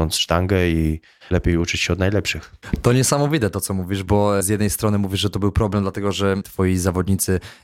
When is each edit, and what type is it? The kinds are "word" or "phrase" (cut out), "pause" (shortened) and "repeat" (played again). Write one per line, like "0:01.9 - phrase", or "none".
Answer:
none